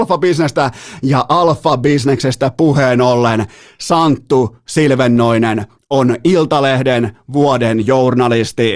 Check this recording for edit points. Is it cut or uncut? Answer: uncut